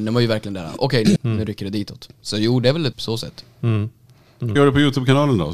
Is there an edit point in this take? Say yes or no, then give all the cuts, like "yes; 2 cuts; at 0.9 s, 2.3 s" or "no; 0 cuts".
yes; 3 cuts; at 1.2 s, 2.9 s, 4.6 s